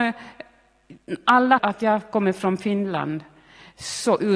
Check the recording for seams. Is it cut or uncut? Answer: cut